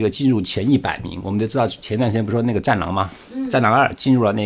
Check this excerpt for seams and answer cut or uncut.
uncut